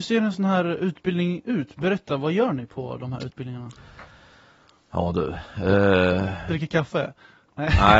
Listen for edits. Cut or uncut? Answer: uncut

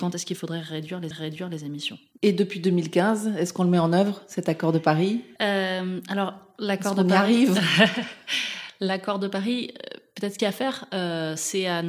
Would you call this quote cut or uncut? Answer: cut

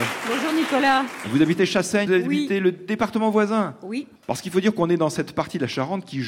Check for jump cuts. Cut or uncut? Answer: cut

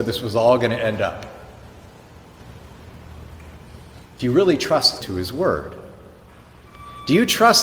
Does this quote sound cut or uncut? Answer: cut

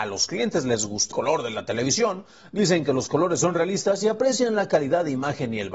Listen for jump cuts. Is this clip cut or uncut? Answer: cut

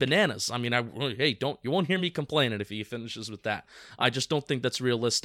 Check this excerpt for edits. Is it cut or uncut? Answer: uncut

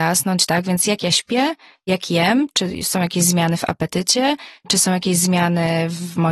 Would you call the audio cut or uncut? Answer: uncut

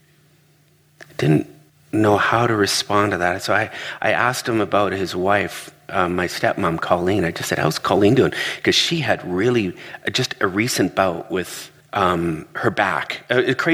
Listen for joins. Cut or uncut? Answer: cut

